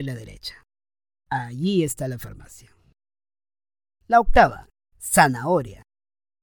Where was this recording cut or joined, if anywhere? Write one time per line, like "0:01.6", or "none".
none